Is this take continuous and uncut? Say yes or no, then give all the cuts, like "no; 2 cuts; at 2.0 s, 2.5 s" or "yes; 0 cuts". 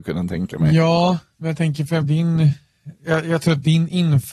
no; 1 cut; at 2.0 s